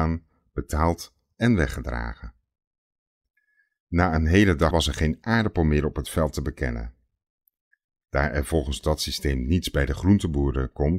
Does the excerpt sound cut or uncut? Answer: cut